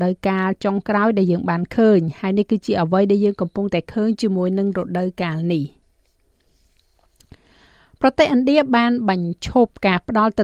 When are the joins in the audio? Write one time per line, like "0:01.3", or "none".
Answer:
none